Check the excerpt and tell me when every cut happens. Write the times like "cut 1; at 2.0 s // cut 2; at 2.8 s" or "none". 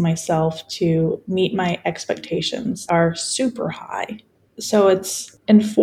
cut 1; at 2.9 s // cut 2; at 4.3 s